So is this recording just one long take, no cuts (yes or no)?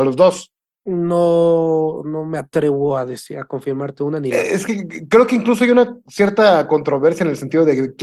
yes